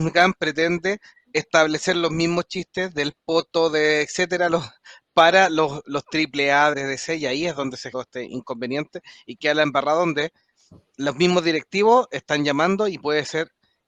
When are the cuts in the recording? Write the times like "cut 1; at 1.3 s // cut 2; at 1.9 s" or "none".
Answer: cut 1; at 6.7 s // cut 2; at 7.9 s

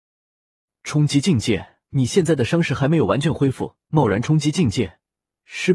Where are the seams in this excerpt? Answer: cut 1; at 1.8 s // cut 2; at 3.8 s

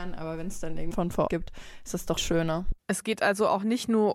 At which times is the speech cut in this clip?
cut 1; at 0.9 s // cut 2; at 1.3 s // cut 3; at 2.2 s

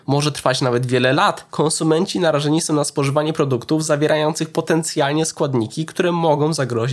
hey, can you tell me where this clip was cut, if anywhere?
cut 1; at 1.5 s

